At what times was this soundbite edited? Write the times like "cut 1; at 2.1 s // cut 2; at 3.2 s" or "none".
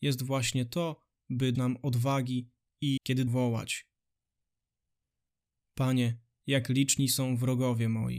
cut 1; at 1.5 s // cut 2; at 3.0 s // cut 3; at 3.3 s